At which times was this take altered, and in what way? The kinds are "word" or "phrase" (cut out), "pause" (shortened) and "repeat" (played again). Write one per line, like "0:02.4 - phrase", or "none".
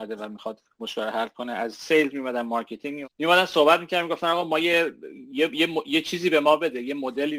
0:03.0 - word